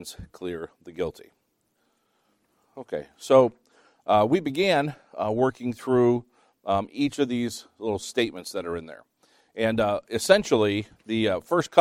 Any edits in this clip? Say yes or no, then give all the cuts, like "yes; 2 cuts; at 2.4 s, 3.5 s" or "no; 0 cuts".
no; 0 cuts